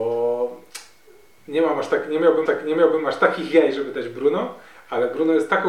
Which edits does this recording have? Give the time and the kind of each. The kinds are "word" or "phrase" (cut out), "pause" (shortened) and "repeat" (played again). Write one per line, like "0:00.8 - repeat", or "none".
0:02.5 - repeat